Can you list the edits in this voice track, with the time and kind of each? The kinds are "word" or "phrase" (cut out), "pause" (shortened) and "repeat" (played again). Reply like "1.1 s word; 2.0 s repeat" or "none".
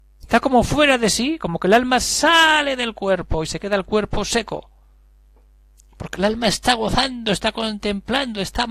none